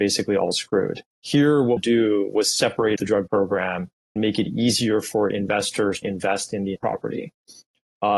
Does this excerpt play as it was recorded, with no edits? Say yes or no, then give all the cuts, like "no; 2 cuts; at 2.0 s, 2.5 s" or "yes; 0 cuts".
no; 7 cuts; at 1.1 s, 1.8 s, 3.0 s, 3.3 s, 4.2 s, 6.0 s, 6.8 s